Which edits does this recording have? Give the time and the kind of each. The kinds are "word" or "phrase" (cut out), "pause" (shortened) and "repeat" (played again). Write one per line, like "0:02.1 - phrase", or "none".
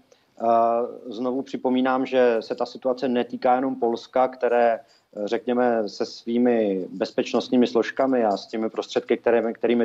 none